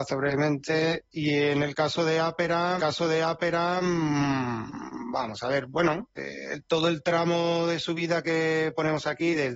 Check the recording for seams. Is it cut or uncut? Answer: cut